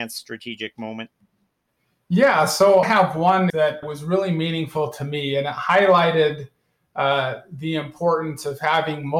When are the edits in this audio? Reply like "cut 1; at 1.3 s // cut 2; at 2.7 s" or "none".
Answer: cut 1; at 2.8 s // cut 2; at 3.5 s // cut 3; at 3.8 s